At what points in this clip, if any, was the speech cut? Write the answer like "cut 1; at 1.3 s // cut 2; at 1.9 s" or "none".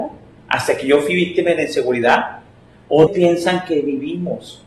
cut 1; at 3.1 s